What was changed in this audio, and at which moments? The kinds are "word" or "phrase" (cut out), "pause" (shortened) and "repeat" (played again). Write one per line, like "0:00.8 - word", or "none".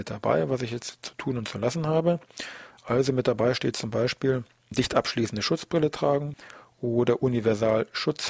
none